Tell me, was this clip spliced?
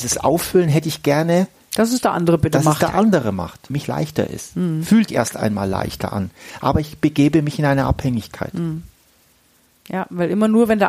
yes; 2 cuts; at 3.7 s, 5.1 s

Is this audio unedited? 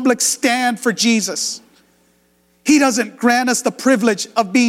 yes; 0 cuts

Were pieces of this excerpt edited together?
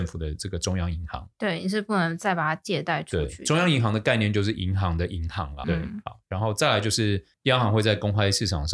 yes; 1 cut; at 5.6 s

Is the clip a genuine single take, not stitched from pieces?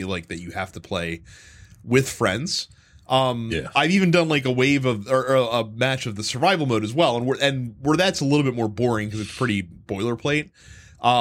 yes; 0 cuts

